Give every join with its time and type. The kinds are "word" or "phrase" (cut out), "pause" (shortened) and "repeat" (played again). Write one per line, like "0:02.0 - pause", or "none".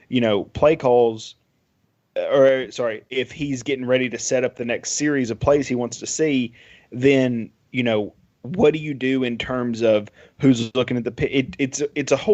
none